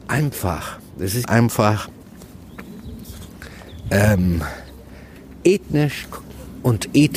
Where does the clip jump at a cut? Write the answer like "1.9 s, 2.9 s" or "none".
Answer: 1.2 s